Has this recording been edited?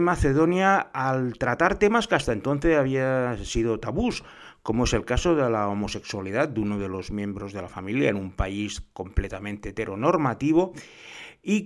no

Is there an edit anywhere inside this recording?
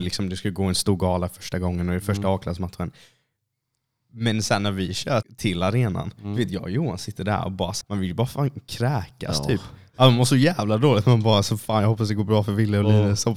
yes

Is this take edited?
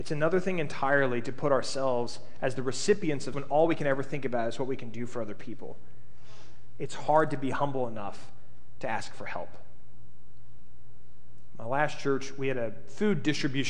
yes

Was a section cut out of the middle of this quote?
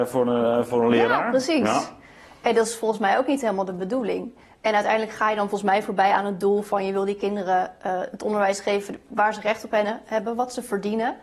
no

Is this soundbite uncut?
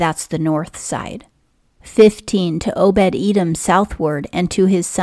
yes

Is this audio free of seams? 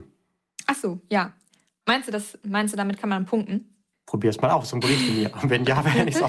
yes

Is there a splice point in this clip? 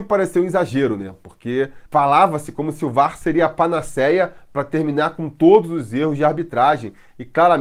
yes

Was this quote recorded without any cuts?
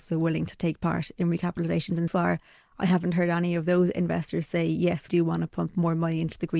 no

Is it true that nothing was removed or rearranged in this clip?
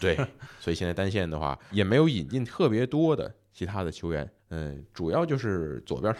no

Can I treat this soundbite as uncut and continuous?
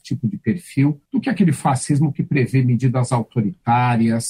no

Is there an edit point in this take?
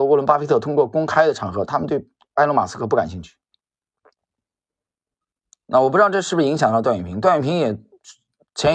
no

